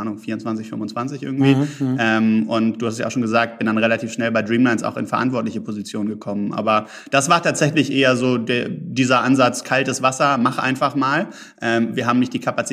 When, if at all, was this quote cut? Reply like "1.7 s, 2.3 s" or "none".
none

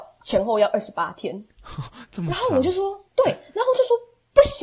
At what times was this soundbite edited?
3.1 s

